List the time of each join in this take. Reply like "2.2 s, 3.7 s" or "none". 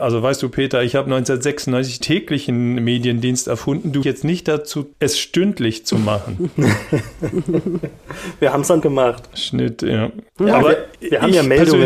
2.0 s, 4.0 s, 4.9 s, 8.8 s, 10.3 s, 10.6 s, 11.0 s